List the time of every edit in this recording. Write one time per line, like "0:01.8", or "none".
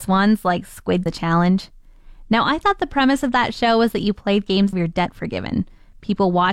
0:01.1
0:04.7